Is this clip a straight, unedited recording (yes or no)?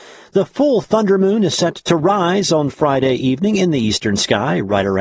yes